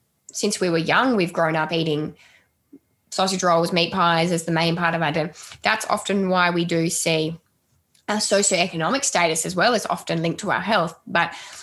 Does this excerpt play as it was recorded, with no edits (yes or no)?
no